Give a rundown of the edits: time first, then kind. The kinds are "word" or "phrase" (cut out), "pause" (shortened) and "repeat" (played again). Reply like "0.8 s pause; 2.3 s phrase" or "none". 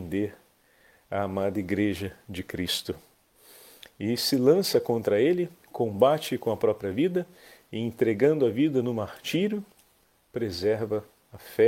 none